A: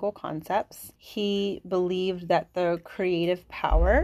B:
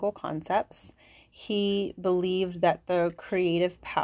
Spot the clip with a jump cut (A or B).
A